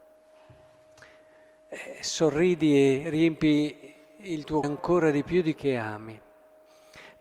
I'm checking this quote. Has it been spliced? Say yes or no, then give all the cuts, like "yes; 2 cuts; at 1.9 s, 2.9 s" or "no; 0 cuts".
yes; 2 cuts; at 4.6 s, 5.5 s